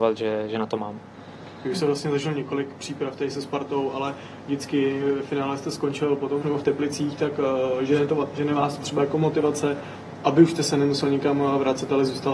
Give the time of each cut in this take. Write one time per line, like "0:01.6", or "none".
0:06.4